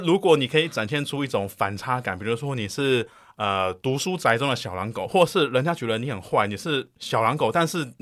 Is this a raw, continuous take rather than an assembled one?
yes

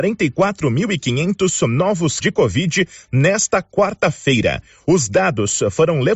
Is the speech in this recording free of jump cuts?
no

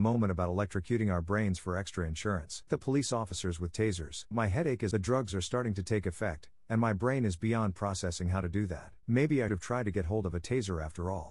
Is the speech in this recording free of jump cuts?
no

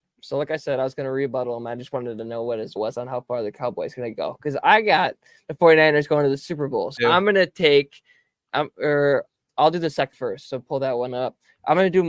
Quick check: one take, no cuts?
no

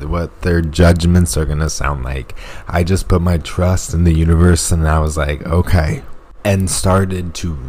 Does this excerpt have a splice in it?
no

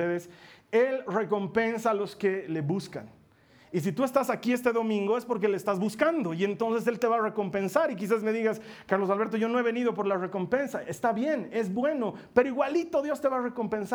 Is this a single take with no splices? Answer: yes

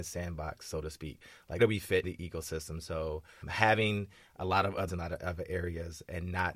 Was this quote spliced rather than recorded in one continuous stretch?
yes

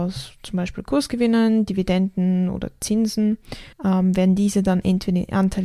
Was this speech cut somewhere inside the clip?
yes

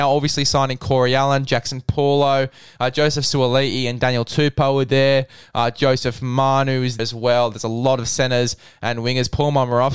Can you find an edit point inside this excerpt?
yes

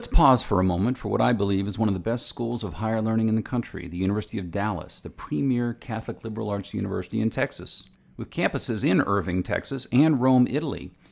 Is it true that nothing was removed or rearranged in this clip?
no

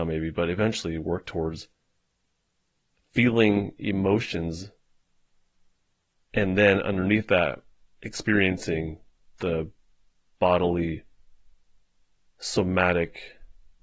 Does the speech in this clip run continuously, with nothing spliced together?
yes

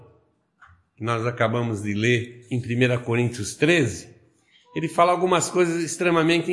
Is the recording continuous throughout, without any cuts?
yes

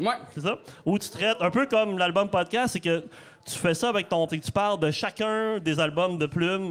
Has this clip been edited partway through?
yes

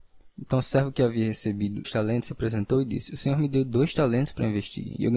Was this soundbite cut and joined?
yes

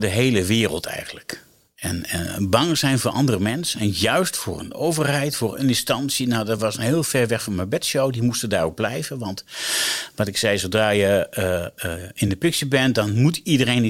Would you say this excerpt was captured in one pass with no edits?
yes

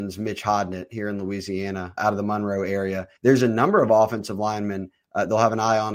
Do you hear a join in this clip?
yes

